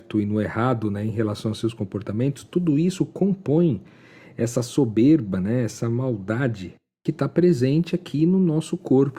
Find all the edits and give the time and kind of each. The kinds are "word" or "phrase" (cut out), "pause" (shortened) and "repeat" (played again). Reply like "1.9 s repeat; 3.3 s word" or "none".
none